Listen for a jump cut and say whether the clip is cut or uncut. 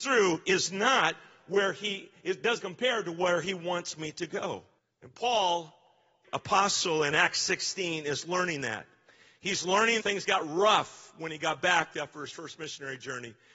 cut